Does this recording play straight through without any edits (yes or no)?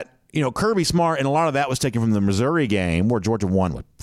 yes